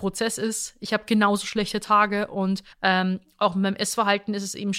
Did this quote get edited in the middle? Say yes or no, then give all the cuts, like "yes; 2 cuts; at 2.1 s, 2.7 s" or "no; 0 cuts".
yes; 1 cut; at 2.7 s